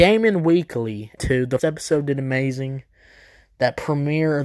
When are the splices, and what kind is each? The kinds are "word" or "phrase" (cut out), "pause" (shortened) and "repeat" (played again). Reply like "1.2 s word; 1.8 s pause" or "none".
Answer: 1.2 s word; 1.6 s word